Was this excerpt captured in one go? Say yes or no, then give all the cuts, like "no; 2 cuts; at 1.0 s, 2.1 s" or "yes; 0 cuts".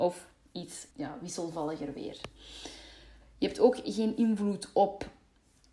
no; 1 cut; at 0.9 s